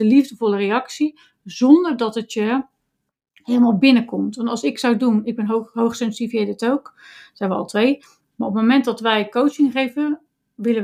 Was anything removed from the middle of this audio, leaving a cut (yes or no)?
no